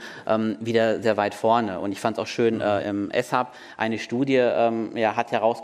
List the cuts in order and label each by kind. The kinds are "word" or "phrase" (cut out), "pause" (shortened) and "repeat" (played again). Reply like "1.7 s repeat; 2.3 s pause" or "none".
1.0 s word; 2.8 s word

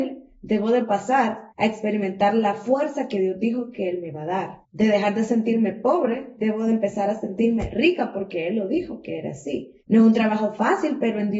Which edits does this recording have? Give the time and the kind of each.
1.5 s pause; 4.6 s pause; 9.8 s pause

